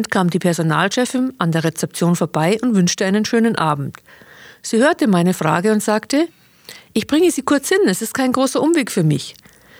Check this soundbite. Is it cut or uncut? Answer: uncut